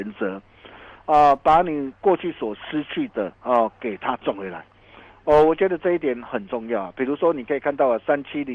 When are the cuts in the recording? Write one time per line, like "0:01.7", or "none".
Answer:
0:03.3